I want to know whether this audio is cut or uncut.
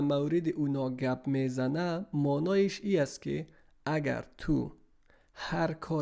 uncut